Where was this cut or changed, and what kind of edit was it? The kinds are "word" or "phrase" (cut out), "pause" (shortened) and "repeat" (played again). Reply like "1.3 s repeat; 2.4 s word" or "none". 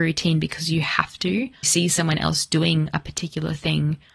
1.6 s phrase